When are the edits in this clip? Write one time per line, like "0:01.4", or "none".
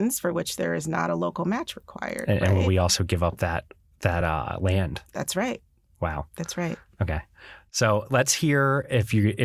none